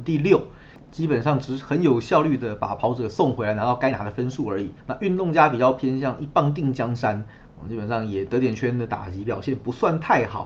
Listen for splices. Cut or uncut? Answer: cut